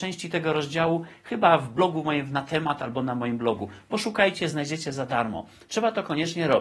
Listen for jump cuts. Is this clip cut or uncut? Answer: uncut